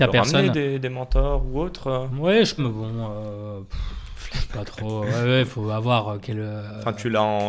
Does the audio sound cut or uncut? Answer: cut